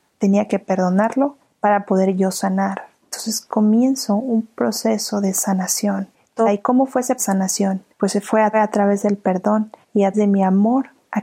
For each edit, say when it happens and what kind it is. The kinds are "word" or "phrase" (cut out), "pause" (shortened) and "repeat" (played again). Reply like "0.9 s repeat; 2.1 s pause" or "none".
1.4 s pause; 3.0 s pause; 6.5 s phrase; 7.2 s phrase; 7.9 s pause; 8.5 s repeat; 9.8 s pause; 10.1 s word